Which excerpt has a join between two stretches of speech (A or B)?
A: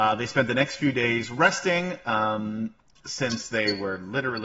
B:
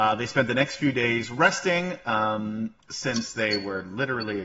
B